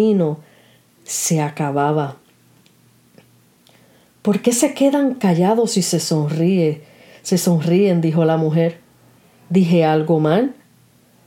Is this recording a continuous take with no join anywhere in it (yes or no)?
yes